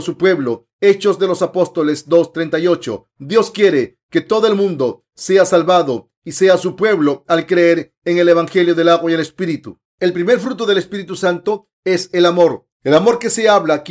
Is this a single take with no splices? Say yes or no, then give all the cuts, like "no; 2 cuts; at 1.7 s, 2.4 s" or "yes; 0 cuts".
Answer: no; 2 cuts; at 9.9 s, 12.7 s